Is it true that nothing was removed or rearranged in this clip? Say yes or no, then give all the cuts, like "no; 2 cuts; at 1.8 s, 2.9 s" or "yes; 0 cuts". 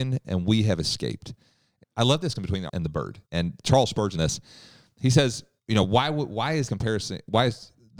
no; 7 cuts; at 1.8 s, 2.4 s, 2.7 s, 3.3 s, 4.1 s, 5.6 s, 6.7 s